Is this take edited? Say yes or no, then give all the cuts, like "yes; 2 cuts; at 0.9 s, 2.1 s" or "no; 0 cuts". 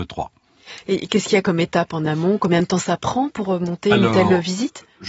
no; 0 cuts